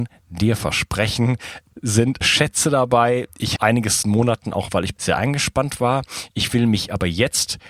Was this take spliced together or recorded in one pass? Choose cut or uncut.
cut